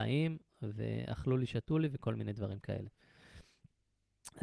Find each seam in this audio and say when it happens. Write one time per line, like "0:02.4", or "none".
none